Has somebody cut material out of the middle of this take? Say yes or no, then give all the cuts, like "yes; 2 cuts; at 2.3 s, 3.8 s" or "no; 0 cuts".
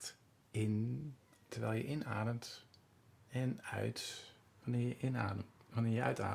no; 0 cuts